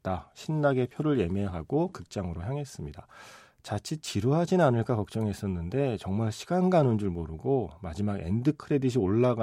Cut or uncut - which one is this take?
uncut